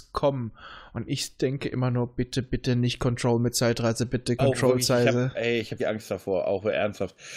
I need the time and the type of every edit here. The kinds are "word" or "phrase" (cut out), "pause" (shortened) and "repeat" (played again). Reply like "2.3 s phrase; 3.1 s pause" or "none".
4.4 s phrase; 5.8 s word

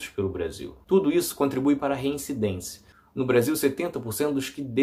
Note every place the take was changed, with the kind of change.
none

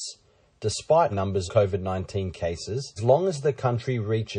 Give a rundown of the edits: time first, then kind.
1.1 s word; 1.5 s word; 3.0 s word

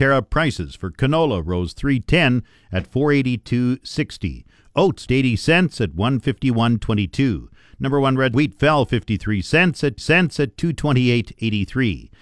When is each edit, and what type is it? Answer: 5.1 s word; 8.3 s word; 10.0 s repeat

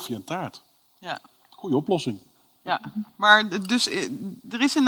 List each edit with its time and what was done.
none

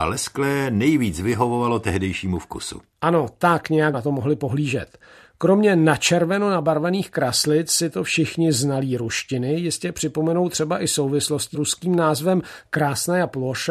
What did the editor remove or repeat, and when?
3.9 s word; 11.5 s word

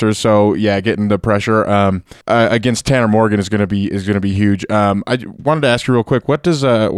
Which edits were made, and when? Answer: 2.2 s pause

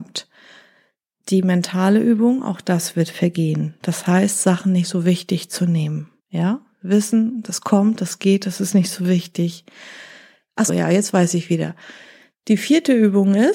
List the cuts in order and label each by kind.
6.2 s pause; 10.7 s word

